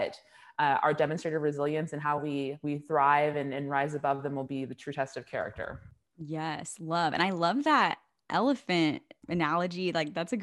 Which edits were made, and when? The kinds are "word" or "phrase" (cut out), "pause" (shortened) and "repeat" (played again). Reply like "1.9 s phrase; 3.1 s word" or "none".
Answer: none